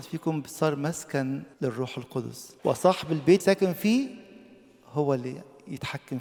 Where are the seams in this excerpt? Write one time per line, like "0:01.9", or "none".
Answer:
0:01.5
0:02.6
0:03.4